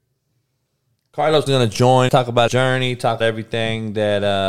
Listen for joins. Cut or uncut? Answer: cut